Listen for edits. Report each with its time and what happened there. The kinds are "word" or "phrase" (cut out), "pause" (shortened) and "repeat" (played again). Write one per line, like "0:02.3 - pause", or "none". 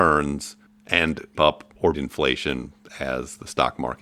0:01.3 - word
0:01.9 - word

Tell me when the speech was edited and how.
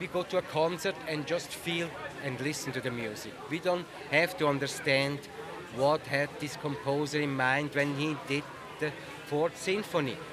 none

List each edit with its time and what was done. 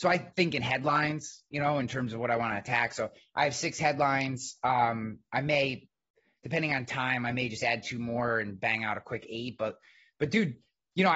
none

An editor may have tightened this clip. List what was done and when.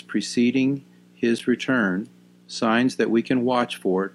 none

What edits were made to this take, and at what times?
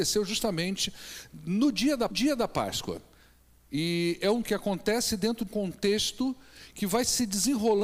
0:02.1 - repeat
0:04.4 - word
0:05.5 - word

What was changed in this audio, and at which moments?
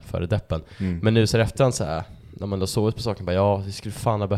none

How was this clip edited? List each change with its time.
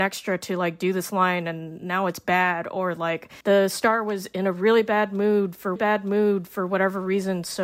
0:03.4 - pause
0:05.8 - repeat

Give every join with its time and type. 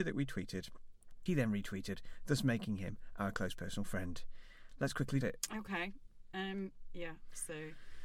0:01.3 - word
0:05.2 - word

